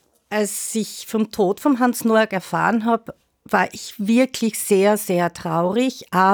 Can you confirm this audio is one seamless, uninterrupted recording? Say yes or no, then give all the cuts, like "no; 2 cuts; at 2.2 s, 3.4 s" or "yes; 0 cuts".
yes; 0 cuts